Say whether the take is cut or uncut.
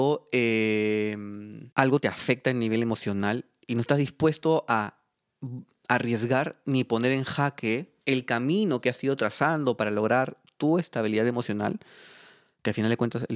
cut